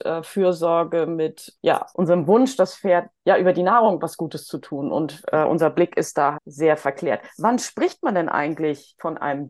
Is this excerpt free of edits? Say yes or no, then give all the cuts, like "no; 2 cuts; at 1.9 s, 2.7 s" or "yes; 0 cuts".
no; 4 cuts; at 1.5 s, 1.9 s, 3.2 s, 6.3 s